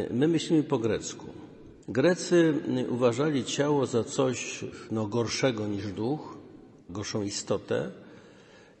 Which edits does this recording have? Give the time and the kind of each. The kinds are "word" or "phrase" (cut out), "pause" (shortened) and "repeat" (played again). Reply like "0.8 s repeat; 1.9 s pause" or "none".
1.8 s pause; 6.8 s pause